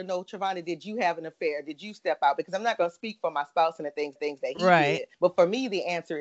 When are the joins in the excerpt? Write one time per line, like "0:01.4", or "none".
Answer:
0:04.2
0:05.1

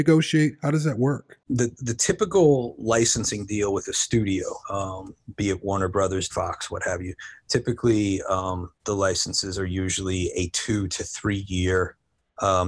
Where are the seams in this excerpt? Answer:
0:04.6
0:06.3
0:08.8

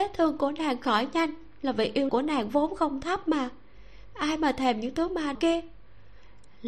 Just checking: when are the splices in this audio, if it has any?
0:02.1
0:05.3

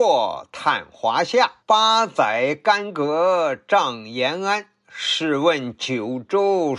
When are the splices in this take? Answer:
0:01.6

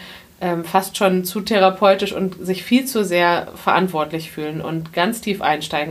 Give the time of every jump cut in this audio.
none

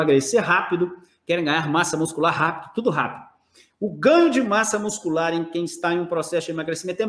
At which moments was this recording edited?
none

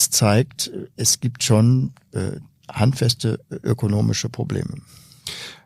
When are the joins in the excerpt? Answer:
none

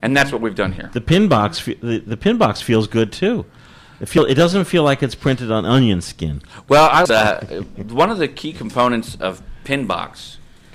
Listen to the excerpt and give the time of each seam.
0:07.1

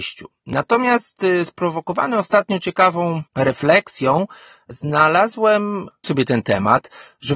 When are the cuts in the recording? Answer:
0:03.3
0:06.0

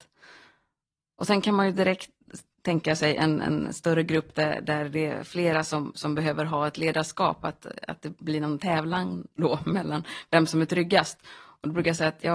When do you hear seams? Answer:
none

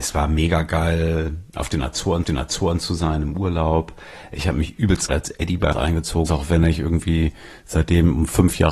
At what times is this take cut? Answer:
0:02.2
0:05.1
0:05.7
0:06.3

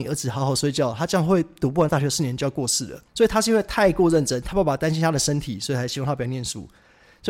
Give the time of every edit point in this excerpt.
0:03.1

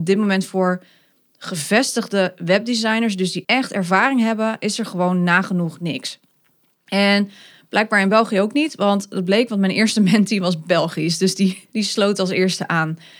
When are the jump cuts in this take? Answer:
0:03.4
0:11.7

